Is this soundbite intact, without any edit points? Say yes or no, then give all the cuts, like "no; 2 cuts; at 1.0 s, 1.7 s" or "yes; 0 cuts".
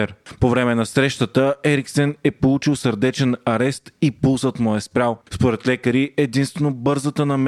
yes; 0 cuts